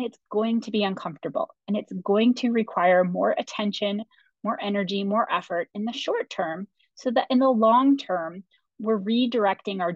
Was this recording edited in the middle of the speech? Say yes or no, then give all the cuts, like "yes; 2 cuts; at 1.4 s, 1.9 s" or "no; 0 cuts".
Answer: no; 0 cuts